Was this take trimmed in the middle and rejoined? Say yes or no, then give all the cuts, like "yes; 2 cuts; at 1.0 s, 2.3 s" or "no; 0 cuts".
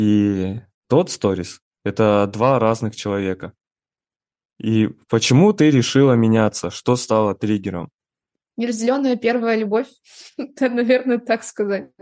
no; 0 cuts